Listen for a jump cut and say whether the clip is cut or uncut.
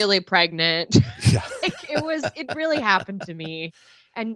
uncut